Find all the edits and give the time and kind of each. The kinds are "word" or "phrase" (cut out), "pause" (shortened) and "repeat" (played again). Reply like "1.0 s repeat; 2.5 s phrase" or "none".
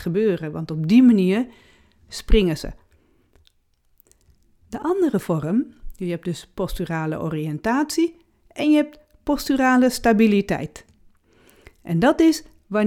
none